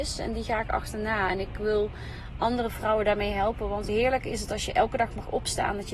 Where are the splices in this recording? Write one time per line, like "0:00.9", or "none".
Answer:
0:03.9